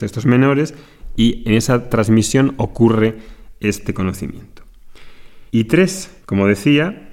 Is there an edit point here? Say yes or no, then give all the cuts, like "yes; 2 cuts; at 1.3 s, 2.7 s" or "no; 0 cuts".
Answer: yes; 2 cuts; at 5.5 s, 6.2 s